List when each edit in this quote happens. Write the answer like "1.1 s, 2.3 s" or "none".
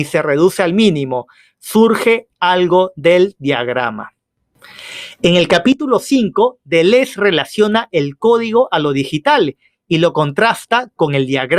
none

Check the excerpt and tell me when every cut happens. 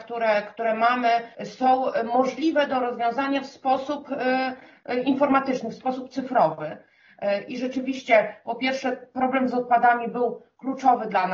1.3 s

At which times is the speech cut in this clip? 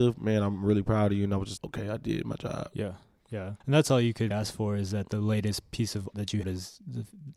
1.6 s, 3.6 s, 4.3 s, 6.1 s, 6.4 s

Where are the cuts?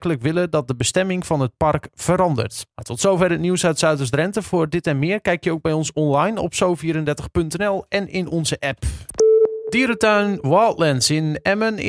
2.7 s

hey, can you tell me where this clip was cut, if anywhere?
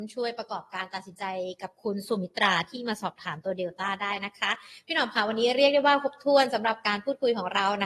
none

